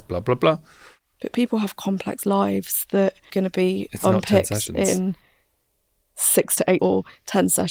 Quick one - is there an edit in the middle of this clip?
yes; 2 cuts; at 3.3 s, 6.8 s

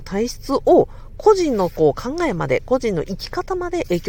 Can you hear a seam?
no; 0 cuts

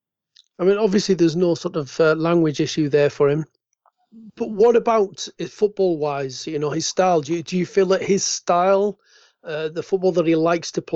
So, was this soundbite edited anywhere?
no; 0 cuts

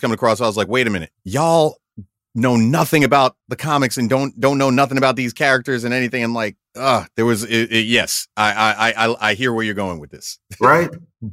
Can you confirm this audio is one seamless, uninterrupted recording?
no; 2 cuts; at 1.1 s, 3.4 s

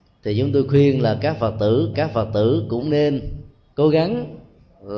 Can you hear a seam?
yes; 2 cuts; at 1.9 s, 3.7 s

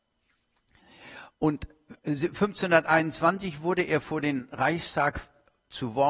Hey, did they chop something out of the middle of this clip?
no; 0 cuts

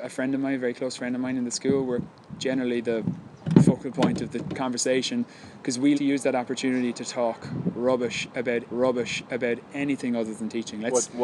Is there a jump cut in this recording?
yes; 2 cuts; at 5.9 s, 8.7 s

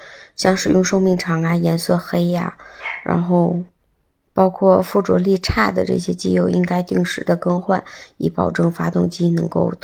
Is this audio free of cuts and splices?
yes; 0 cuts

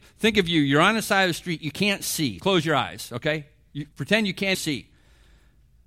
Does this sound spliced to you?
yes; 3 cuts; at 2.4 s, 3.9 s, 4.5 s

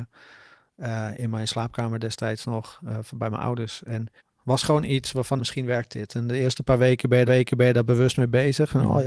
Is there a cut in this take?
yes; 3 cuts; at 4.2 s, 5.4 s, 7.3 s

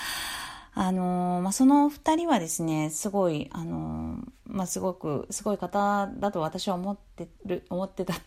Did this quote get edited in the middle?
yes; 1 cut; at 7.4 s

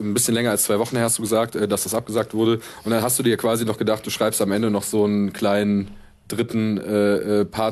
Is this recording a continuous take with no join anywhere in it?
yes; 0 cuts

